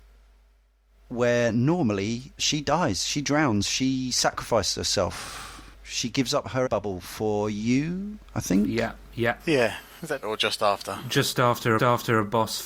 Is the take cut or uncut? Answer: cut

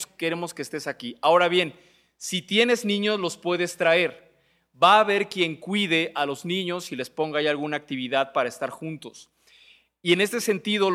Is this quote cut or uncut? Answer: uncut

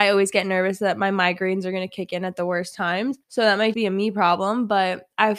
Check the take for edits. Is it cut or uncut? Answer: cut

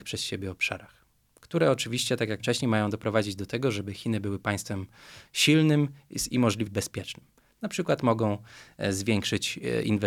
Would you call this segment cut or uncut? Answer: cut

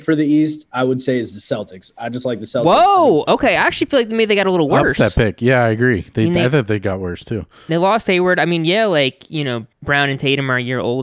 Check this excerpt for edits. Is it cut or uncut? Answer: cut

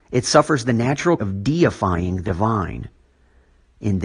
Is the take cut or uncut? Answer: cut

